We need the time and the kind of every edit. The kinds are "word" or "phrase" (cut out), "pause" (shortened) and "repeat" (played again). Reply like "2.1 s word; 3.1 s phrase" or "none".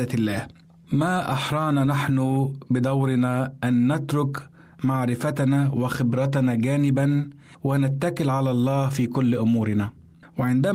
none